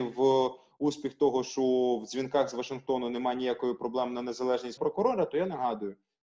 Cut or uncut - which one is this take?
cut